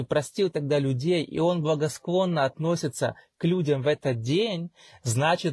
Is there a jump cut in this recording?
no; 0 cuts

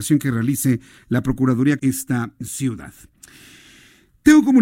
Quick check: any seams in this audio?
yes; 1 cut; at 1.8 s

